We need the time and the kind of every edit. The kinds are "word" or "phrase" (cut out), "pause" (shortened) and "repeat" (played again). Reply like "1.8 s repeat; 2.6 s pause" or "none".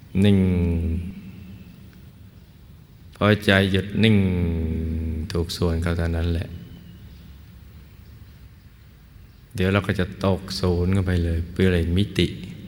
none